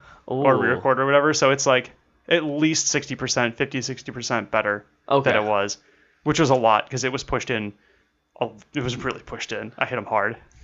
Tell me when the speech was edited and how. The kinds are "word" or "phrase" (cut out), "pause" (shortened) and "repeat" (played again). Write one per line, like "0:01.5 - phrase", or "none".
none